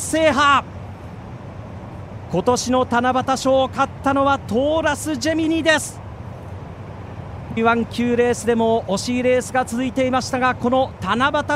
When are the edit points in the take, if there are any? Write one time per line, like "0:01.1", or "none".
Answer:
0:07.6